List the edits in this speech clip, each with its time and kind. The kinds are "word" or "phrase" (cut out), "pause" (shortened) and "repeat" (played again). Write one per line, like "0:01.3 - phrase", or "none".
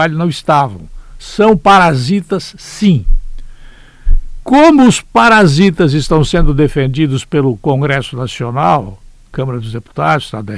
none